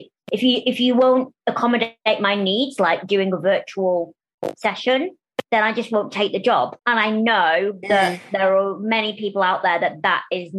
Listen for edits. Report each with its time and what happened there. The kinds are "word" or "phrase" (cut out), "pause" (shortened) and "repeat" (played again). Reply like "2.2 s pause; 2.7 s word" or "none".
5.4 s pause; 6.8 s pause